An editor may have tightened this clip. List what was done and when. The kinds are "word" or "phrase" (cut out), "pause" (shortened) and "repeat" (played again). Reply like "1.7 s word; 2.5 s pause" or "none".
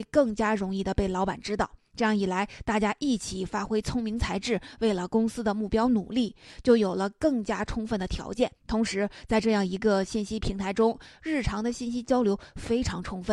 8.6 s pause